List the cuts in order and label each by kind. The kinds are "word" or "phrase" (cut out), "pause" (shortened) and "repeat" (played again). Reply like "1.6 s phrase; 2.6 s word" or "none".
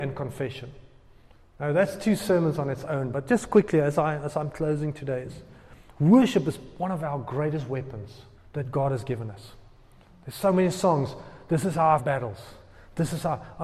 8.4 s pause; 12.0 s phrase